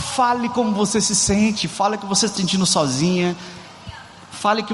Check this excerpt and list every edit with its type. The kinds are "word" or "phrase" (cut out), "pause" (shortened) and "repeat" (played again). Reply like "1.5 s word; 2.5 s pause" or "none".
2.4 s word